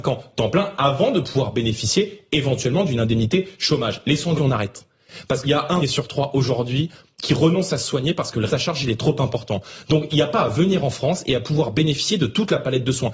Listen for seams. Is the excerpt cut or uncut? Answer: cut